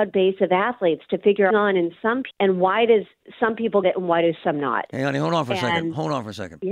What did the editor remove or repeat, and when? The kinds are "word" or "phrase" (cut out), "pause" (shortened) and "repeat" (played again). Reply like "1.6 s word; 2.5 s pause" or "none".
1.5 s phrase; 2.3 s word; 3.8 s word